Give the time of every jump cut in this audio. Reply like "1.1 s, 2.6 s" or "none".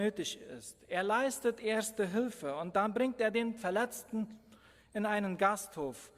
none